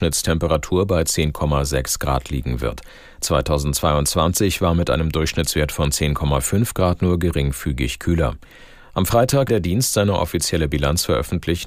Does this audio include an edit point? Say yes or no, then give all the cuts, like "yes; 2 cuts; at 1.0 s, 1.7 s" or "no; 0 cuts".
yes; 1 cut; at 9.5 s